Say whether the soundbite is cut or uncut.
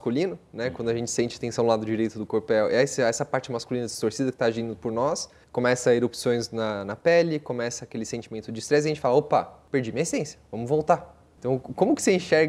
uncut